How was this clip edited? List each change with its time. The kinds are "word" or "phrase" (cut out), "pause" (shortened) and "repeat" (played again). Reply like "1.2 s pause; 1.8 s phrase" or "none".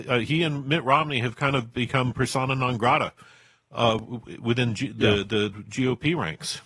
5.5 s word